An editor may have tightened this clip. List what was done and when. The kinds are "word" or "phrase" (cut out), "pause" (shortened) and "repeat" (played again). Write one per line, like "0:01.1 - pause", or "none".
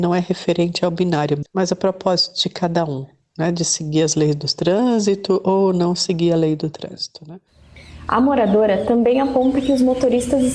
none